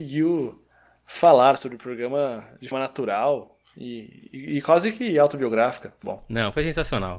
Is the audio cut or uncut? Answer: cut